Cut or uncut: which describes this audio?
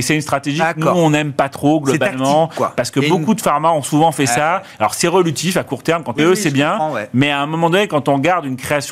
cut